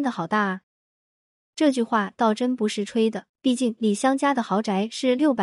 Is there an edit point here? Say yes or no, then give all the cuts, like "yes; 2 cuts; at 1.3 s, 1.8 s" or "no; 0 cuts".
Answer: yes; 1 cut; at 3.3 s